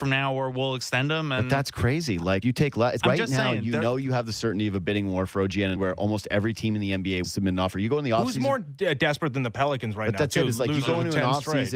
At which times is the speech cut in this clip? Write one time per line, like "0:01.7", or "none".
0:02.4
0:03.0
0:05.8
0:07.2